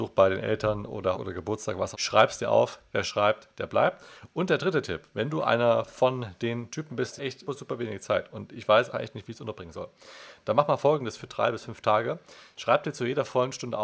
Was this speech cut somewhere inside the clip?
yes; 5 cuts; at 1.1 s, 1.9 s, 7.2 s, 7.5 s, 8.9 s

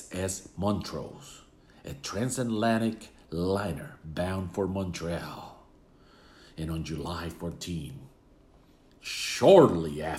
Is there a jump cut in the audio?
no; 0 cuts

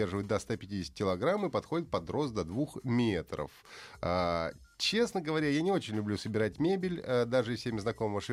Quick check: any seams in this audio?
no; 0 cuts

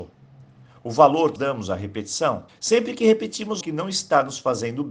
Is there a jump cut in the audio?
yes; 3 cuts; at 1.4 s, 2.5 s, 3.6 s

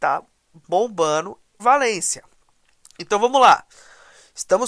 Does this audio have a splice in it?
yes; 1 cut; at 1.6 s

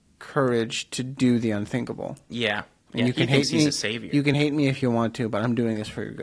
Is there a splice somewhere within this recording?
no; 0 cuts

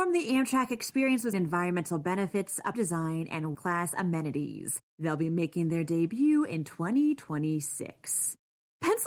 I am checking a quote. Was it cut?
yes; 4 cuts; at 1.3 s, 2.7 s, 3.5 s, 4.9 s

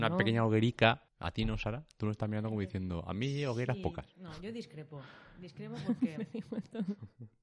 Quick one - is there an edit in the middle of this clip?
yes; 1 cut; at 1.1 s

